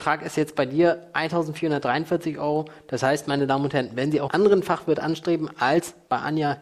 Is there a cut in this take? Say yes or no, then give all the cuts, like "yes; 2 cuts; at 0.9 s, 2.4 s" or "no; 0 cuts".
yes; 1 cut; at 4.3 s